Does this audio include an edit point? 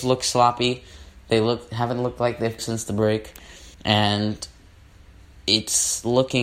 yes; 2 cuts; at 2.6 s, 3.7 s

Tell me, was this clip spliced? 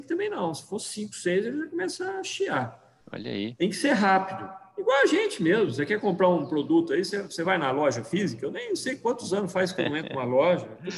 yes; 1 cut; at 3.0 s

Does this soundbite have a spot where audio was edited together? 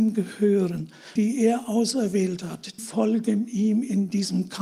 yes; 2 cuts; at 1.2 s, 2.8 s

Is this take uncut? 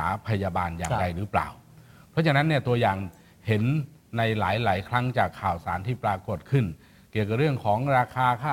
yes; 0 cuts

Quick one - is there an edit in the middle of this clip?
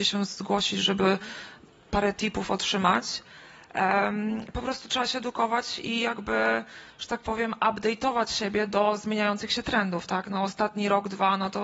no; 0 cuts

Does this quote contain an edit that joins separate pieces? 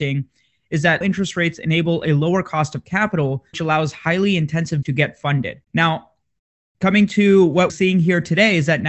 yes; 5 cuts; at 1.0 s, 3.5 s, 4.8 s, 5.6 s, 7.7 s

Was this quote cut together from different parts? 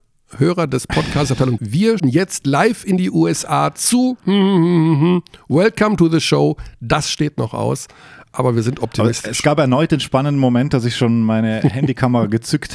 yes; 2 cuts; at 1.6 s, 2.0 s

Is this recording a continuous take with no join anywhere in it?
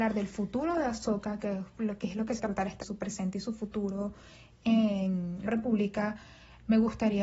no; 3 cuts; at 2.4 s, 2.8 s, 5.5 s

